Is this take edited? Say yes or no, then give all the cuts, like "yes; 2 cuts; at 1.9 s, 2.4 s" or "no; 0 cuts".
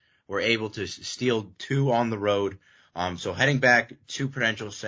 no; 0 cuts